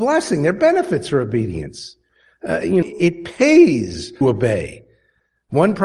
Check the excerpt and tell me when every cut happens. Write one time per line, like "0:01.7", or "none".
0:02.8
0:04.2

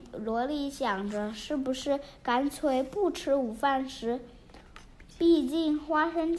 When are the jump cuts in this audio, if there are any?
0:05.1

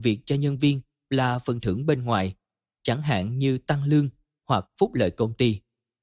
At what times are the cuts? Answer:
none

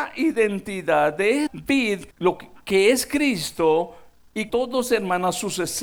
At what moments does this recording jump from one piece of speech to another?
0:01.5
0:02.1
0:04.5

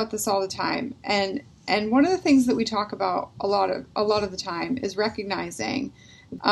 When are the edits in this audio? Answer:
none

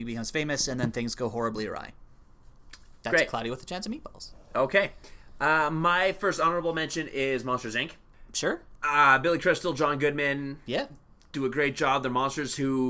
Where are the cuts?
none

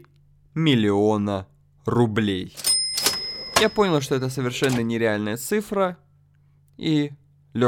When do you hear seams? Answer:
none

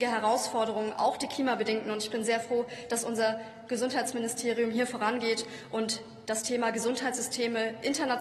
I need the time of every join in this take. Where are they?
none

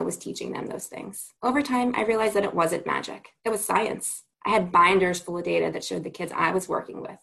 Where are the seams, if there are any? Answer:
0:01.4
0:03.4
0:04.3

